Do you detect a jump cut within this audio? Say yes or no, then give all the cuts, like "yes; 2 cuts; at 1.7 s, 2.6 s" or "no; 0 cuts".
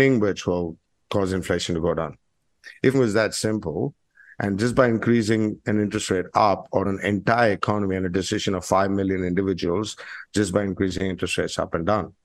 yes; 2 cuts; at 2.9 s, 6.8 s